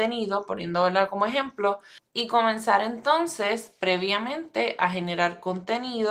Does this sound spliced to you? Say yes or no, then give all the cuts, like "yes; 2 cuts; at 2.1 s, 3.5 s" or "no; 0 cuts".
no; 0 cuts